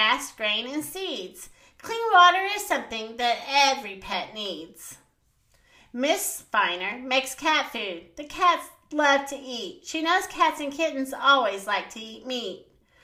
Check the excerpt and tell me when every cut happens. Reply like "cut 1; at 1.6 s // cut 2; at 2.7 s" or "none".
none